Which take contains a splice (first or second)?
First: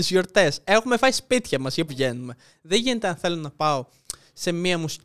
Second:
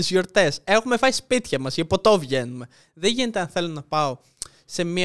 first